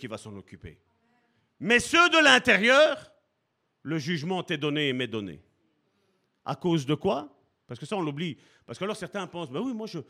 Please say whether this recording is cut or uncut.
uncut